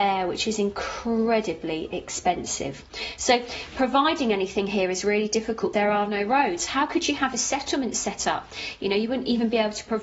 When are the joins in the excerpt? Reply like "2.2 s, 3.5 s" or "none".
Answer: 5.7 s